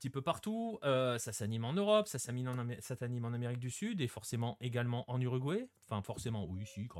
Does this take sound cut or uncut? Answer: uncut